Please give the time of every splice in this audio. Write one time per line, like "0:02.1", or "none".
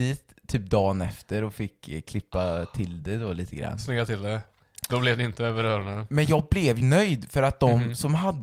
0:06.8